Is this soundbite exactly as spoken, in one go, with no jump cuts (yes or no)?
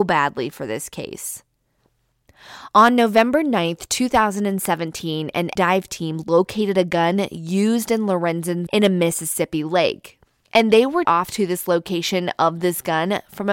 no